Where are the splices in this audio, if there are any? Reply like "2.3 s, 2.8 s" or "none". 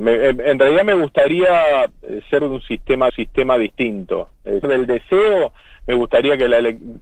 2.4 s, 3.1 s, 4.6 s

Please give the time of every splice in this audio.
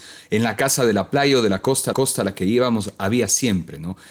1.9 s

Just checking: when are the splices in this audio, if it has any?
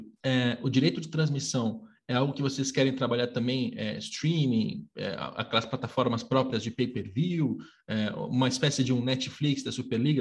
none

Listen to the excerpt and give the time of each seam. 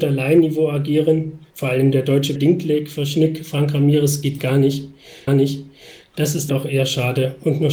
1.5 s, 2.4 s, 4.4 s, 5.3 s, 6.5 s

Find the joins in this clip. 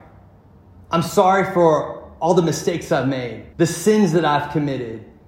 3.5 s

